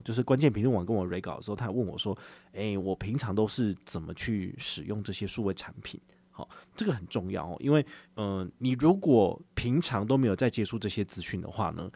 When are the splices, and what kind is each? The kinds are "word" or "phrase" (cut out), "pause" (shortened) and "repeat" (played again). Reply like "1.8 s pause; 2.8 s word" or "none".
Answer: 8.0 s pause; 9.5 s pause